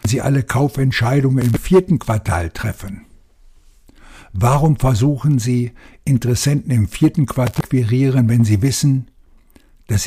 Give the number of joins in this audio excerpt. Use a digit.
0